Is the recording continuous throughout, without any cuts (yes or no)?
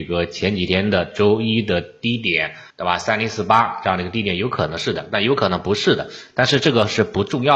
no